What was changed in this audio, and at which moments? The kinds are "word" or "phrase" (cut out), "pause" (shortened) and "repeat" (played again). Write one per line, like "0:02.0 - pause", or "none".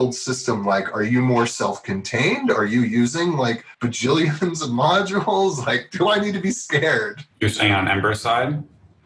0:03.7 - pause
0:07.3 - pause